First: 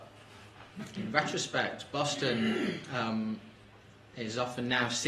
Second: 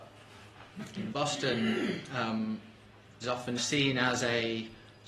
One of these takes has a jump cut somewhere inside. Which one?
second; 3 cuts; at 1.1 s, 3.2 s, 3.6 s

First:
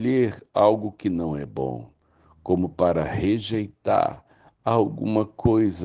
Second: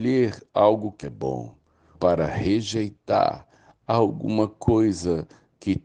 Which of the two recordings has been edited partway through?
second; 2 cuts; at 1.0 s, 2.0 s

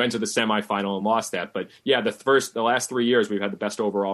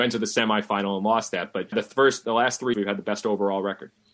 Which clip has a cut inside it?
second; 2 cuts; at 1.7 s, 2.7 s

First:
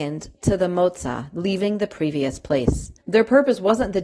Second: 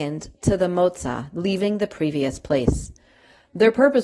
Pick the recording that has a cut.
first; 1 cut; at 3.0 s

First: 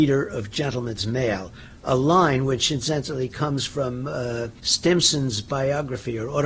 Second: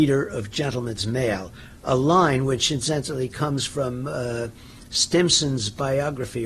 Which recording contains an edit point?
first; 1 cut; at 4.6 s

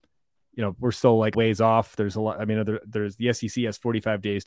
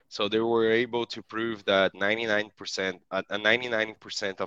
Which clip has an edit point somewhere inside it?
first; 1 cut; at 1.3 s

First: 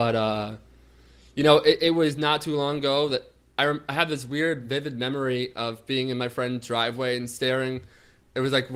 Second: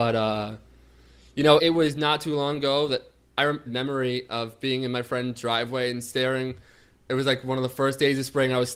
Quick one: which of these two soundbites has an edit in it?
second; 2 cuts; at 1.6 s, 3.7 s

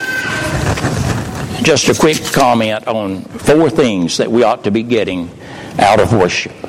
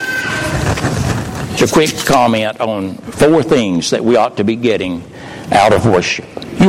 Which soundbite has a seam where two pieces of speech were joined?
second; 1 cut; at 1.6 s

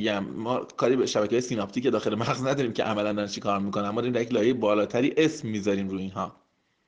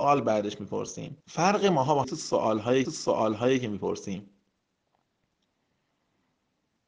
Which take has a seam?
second; 3 cuts; at 1.2 s, 2.0 s, 2.8 s

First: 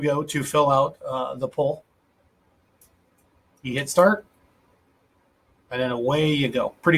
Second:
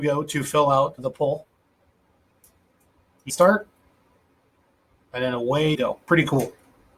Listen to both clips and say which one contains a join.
second; 3 cuts; at 1.0 s, 3.3 s, 5.7 s

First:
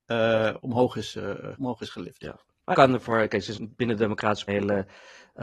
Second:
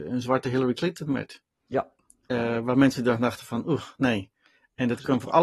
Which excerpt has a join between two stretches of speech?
first; 4 cuts; at 1.5 s, 2.7 s, 3.5 s, 4.5 s

